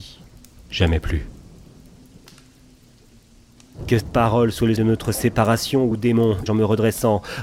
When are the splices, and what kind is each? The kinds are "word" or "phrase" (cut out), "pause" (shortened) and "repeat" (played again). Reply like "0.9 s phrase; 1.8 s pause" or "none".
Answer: 4.0 s word; 4.8 s word; 5.9 s word; 6.5 s word